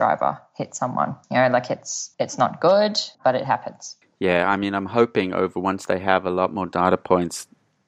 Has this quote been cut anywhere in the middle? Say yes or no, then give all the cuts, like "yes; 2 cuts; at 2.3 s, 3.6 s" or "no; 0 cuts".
yes; 4 cuts; at 1.2 s, 2.1 s, 3.1 s, 4.0 s